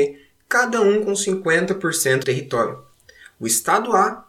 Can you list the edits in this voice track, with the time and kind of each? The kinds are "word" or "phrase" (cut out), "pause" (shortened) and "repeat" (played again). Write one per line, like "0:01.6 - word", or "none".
0:02.2 - word